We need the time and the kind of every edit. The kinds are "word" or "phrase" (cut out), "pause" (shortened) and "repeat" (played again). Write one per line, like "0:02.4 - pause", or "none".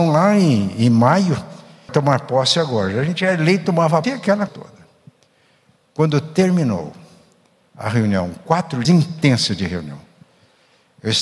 0:01.9 - word
0:04.0 - word
0:04.5 - word
0:08.8 - word